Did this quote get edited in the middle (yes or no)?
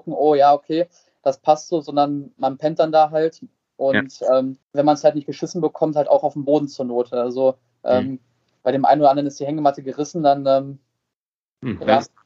yes